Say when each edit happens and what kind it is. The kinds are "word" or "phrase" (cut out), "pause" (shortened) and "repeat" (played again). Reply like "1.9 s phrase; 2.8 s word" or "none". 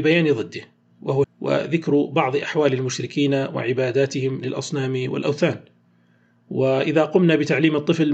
1.2 s word